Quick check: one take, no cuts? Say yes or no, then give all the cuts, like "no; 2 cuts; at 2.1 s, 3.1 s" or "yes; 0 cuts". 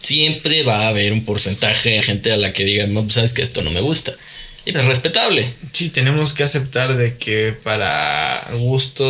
no; 2 cuts; at 2.0 s, 4.7 s